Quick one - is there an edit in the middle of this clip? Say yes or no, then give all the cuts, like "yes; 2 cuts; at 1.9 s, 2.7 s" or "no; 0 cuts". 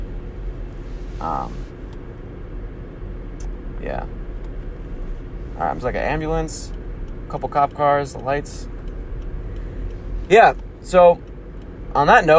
yes; 3 cuts; at 5.8 s, 7.3 s, 8.1 s